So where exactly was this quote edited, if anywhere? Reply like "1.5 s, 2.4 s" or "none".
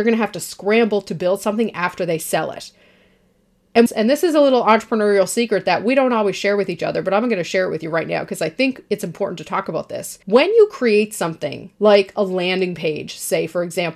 3.9 s, 10.2 s, 11.7 s